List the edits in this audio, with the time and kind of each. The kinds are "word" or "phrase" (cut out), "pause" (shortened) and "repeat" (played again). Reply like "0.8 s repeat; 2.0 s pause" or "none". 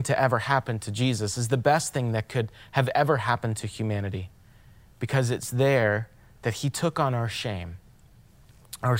none